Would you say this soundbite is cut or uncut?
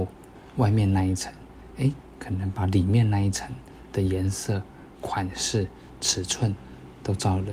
uncut